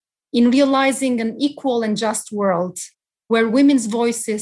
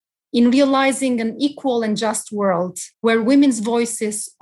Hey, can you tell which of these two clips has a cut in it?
second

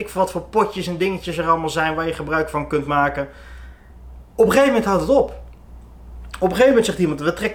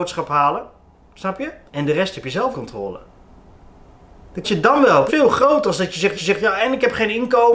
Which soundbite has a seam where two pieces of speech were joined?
second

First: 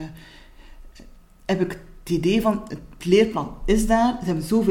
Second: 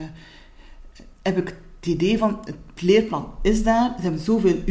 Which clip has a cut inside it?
second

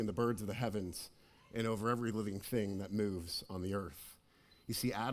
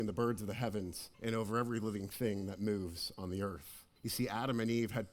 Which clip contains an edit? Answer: second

